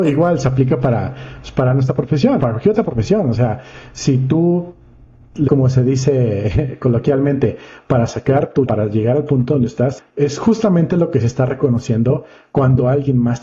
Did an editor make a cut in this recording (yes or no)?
yes